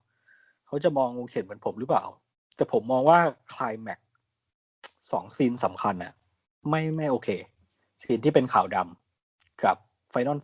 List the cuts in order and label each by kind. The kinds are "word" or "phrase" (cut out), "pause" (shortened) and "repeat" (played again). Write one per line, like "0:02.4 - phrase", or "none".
0:02.3 - pause
0:06.4 - pause
0:09.0 - pause